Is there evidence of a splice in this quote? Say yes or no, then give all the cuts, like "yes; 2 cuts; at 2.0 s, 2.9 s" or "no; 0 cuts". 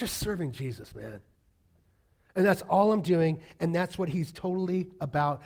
no; 0 cuts